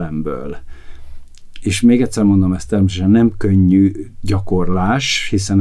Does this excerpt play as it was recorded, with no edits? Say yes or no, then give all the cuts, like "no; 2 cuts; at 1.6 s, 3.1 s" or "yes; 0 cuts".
yes; 0 cuts